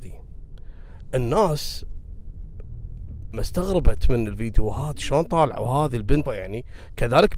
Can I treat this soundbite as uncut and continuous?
no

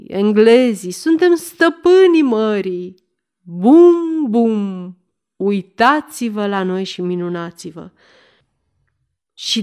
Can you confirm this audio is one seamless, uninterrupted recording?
yes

